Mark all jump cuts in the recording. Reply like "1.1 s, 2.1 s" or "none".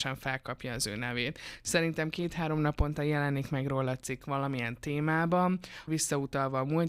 5.9 s